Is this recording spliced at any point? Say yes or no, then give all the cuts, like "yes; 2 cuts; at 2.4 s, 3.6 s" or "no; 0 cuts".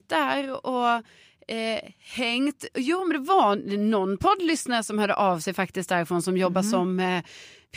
no; 0 cuts